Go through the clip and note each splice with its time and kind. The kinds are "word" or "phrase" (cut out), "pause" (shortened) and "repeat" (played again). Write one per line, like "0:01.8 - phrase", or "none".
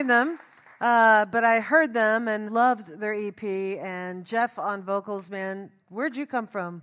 0:02.4 - word
0:05.8 - pause